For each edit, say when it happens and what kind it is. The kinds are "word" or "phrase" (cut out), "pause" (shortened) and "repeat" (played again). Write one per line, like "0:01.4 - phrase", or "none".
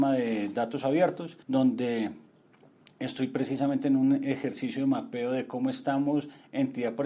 0:01.4 - pause